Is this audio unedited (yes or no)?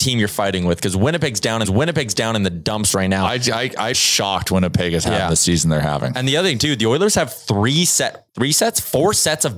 no